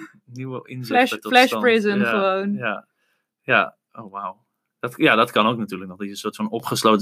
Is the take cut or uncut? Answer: uncut